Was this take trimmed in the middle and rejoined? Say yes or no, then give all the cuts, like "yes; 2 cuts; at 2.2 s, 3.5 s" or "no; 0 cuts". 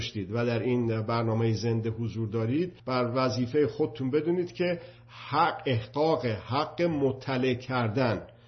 yes; 1 cut; at 2.8 s